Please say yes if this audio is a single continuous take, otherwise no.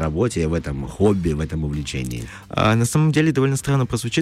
yes